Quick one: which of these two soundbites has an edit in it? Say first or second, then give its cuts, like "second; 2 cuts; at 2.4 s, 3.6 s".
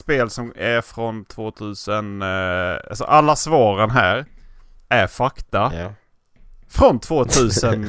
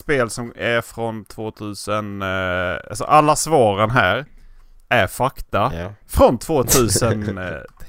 second; 1 cut; at 6.0 s